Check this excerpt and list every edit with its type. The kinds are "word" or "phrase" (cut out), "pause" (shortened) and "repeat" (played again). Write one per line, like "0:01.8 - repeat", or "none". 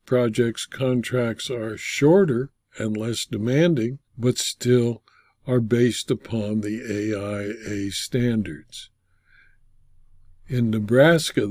0:04.1 - pause